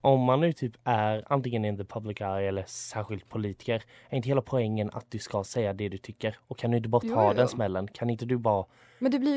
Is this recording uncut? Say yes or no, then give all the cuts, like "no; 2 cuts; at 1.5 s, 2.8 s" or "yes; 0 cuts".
yes; 0 cuts